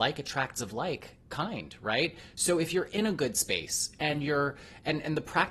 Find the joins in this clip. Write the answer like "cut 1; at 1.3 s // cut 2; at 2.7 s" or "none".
none